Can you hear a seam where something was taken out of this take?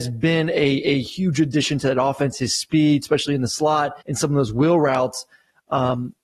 yes; 1 cut; at 4.0 s

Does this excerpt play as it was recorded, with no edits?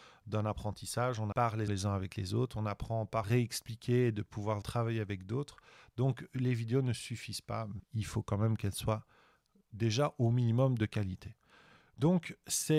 no; 5 cuts; at 1.3 s, 1.7 s, 3.2 s, 4.6 s, 7.8 s

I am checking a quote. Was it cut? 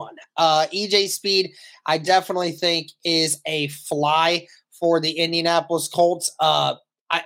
no; 0 cuts

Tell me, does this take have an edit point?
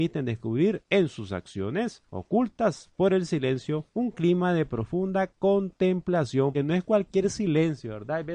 yes; 3 cuts; at 2.1 s, 3.9 s, 6.5 s

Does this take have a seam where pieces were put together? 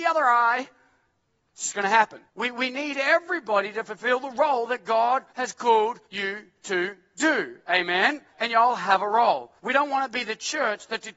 yes; 5 cuts; at 2.3 s, 5.3 s, 6.0 s, 8.3 s, 9.6 s

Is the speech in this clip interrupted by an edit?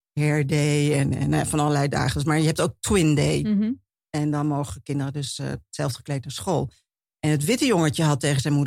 no; 0 cuts

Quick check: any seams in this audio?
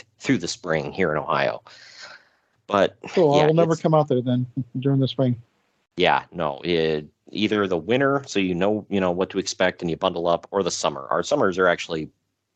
no; 0 cuts

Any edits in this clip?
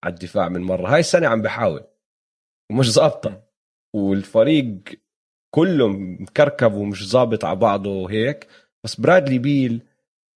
no; 0 cuts

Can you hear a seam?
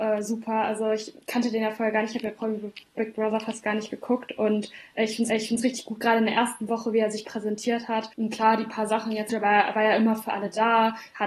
yes; 3 cuts; at 5.3 s, 8.1 s, 9.3 s

